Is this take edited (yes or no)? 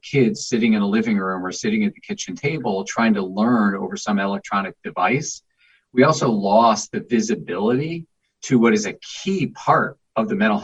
no